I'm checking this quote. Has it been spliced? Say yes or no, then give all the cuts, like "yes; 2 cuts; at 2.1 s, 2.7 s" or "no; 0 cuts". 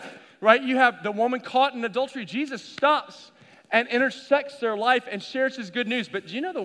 no; 0 cuts